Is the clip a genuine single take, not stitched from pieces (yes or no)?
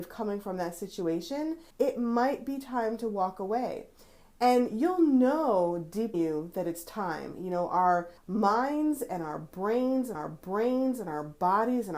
no